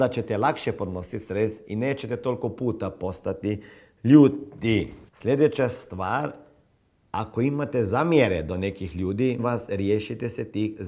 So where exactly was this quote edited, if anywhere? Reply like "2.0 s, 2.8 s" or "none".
5.1 s, 9.4 s